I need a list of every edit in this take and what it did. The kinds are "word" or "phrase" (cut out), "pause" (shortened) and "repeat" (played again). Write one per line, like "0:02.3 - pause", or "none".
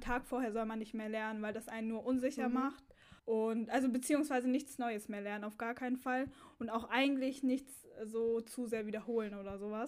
0:03.2 - pause